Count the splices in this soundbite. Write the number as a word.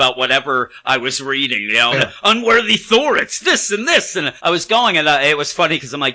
three